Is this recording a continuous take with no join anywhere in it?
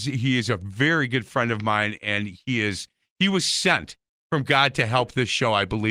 yes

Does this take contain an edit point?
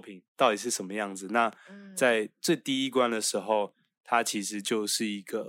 no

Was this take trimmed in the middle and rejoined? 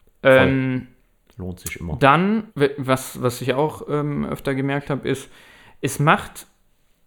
yes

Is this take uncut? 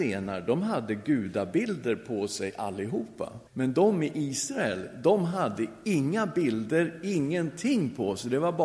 no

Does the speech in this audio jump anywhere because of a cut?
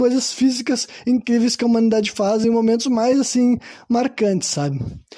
no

